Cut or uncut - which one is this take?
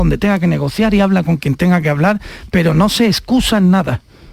uncut